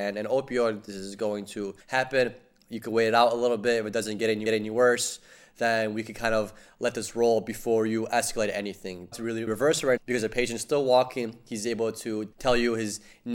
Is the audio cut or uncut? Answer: cut